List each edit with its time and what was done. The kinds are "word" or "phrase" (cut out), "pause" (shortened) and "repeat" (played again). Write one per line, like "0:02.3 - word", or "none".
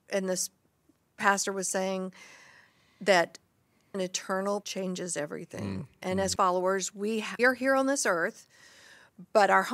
0:03.9 - word
0:04.6 - word
0:06.4 - word
0:07.4 - word

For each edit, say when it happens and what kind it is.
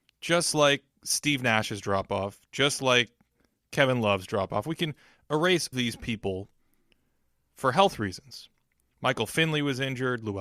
0:05.7 - phrase

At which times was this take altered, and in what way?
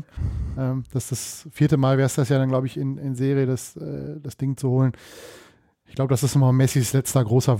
none

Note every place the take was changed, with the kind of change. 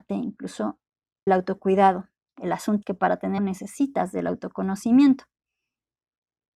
0:01.3 - word
0:02.8 - word
0:03.4 - word

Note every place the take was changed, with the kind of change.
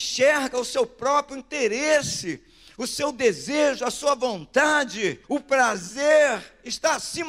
0:05.2 - pause

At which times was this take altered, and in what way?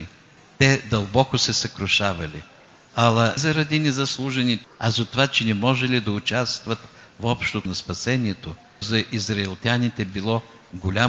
0:03.4 - word
0:04.6 - word
0:07.7 - word
0:08.8 - word

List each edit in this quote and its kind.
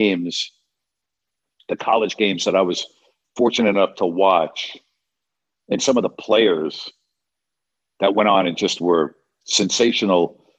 none

